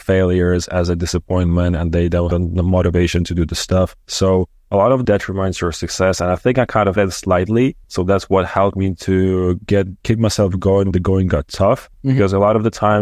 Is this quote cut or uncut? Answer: cut